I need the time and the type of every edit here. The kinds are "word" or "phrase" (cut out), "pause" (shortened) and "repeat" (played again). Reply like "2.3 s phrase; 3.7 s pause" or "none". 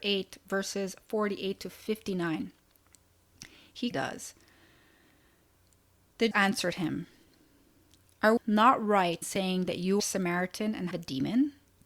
3.9 s word; 6.3 s word; 8.4 s word; 9.2 s word; 10.0 s word; 10.9 s word